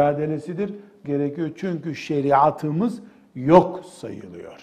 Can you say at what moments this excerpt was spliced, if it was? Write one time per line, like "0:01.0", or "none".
0:01.0